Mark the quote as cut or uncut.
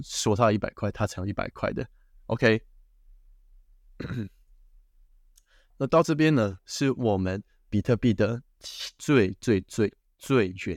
cut